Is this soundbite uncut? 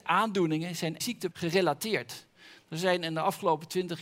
no; 2 cuts; at 1.0 s, 1.3 s

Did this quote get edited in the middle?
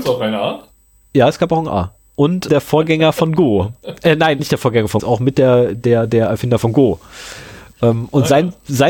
yes; 3 cuts; at 2.5 s, 4.4 s, 5.0 s

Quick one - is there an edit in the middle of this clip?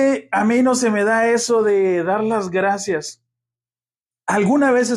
no; 0 cuts

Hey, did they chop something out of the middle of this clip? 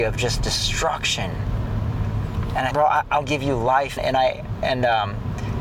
yes; 3 cuts; at 2.7 s, 3.2 s, 4.0 s

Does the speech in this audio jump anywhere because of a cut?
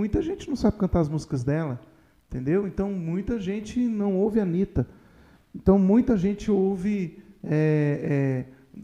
no; 0 cuts

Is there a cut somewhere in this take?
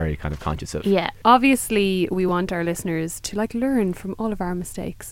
no; 0 cuts

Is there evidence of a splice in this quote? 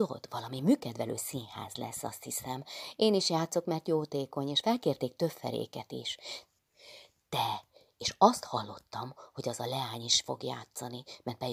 no; 0 cuts

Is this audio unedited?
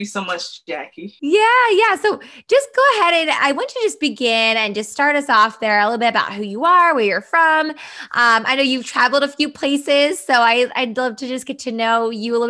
no; 1 cut; at 1.2 s

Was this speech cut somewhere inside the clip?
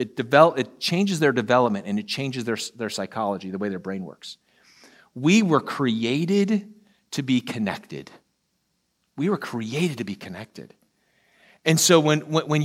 no; 0 cuts

